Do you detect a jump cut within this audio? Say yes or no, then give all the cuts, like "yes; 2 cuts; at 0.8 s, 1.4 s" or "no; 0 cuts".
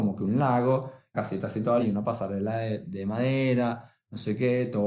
yes; 3 cuts; at 1.1 s, 1.8 s, 2.8 s